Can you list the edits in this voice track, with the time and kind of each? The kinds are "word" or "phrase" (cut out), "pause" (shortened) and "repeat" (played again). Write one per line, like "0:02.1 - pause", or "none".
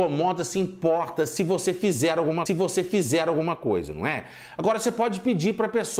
0:02.5 - repeat